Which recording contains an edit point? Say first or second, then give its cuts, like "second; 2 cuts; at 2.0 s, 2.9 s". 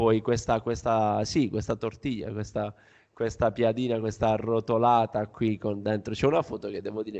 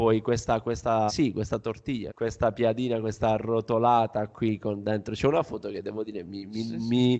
second; 2 cuts; at 1.1 s, 2.1 s